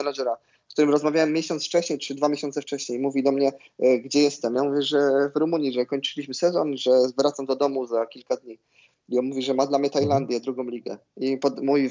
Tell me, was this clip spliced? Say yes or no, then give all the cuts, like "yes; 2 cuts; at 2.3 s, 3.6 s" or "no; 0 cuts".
no; 0 cuts